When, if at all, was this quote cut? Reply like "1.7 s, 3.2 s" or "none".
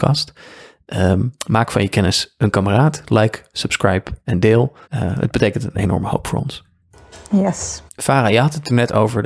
1.4 s, 4.8 s, 7.9 s